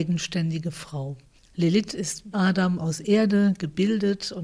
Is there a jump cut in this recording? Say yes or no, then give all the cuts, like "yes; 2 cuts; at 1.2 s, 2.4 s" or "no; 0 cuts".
yes; 1 cut; at 2.3 s